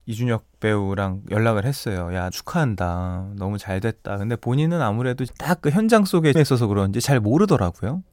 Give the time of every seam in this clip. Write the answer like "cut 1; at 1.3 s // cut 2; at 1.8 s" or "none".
cut 1; at 2.3 s // cut 2; at 5.3 s // cut 3; at 6.3 s